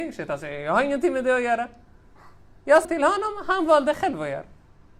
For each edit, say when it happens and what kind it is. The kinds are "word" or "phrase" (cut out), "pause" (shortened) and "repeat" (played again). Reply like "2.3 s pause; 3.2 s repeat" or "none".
2.8 s word